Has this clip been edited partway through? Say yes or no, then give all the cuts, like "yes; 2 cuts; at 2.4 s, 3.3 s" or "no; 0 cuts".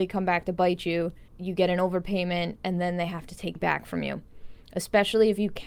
yes; 2 cuts; at 1.3 s, 3.6 s